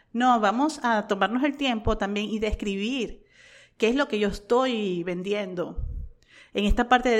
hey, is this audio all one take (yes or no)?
yes